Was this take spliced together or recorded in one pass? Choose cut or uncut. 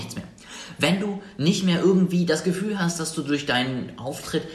uncut